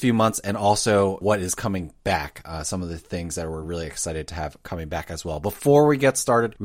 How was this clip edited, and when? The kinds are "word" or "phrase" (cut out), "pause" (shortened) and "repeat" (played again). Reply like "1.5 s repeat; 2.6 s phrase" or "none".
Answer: none